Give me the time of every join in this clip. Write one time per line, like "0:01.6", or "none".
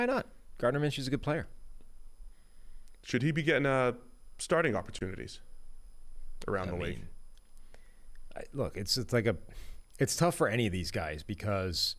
0:09.9